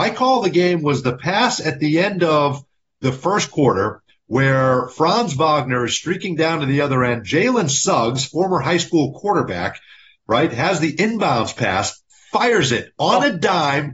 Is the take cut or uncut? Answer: uncut